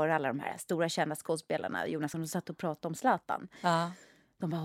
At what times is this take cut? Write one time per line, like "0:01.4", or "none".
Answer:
0:02.1